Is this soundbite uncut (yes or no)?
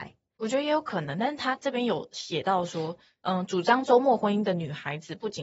yes